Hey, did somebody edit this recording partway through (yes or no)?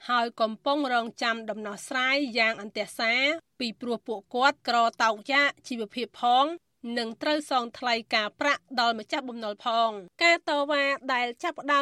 yes